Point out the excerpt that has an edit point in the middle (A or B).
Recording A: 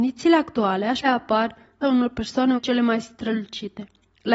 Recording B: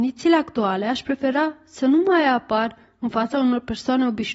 A